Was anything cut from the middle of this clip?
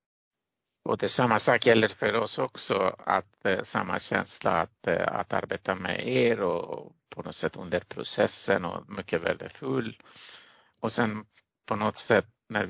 no; 0 cuts

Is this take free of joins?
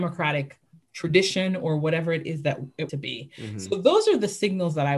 no; 1 cut; at 2.9 s

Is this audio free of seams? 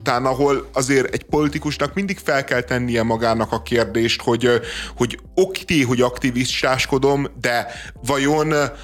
yes; 0 cuts

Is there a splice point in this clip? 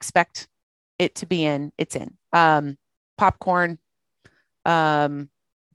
yes; 1 cut; at 2.2 s

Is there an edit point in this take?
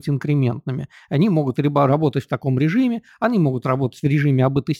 no; 0 cuts

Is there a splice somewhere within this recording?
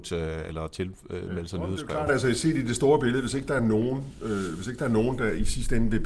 no; 0 cuts

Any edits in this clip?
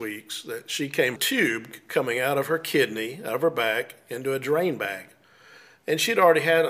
yes; 1 cut; at 1.2 s

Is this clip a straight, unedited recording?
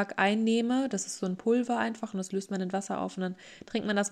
yes; 0 cuts

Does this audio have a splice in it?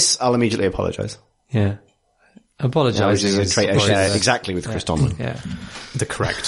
no; 0 cuts

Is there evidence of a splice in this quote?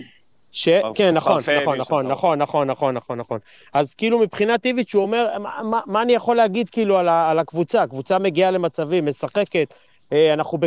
no; 0 cuts

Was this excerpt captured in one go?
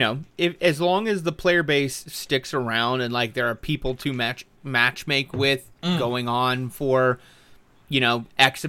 yes; 0 cuts

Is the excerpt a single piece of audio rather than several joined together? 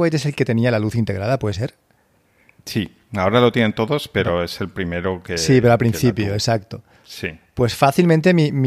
yes; 0 cuts

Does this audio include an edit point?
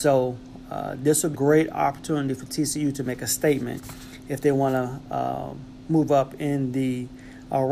yes; 1 cut; at 1.3 s

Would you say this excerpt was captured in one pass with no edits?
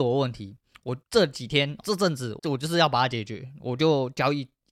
no; 3 cuts; at 1.0 s, 1.8 s, 2.4 s

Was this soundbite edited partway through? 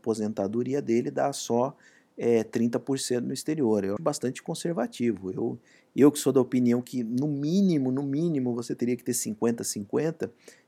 yes; 1 cut; at 4.0 s

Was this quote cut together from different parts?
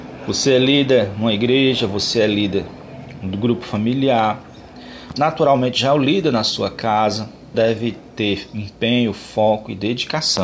yes; 2 cuts; at 5.1 s, 7.5 s

